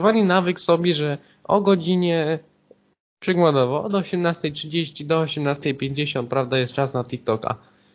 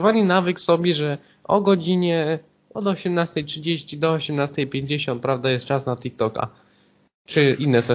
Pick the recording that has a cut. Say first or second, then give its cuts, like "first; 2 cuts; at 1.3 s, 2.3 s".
second; 1 cut; at 2.7 s